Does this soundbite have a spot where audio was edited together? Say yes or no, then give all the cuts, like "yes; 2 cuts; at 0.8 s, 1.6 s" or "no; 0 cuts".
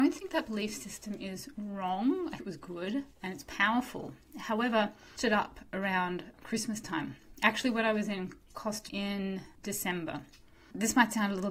yes; 4 cuts; at 2.4 s, 3.1 s, 5.2 s, 8.9 s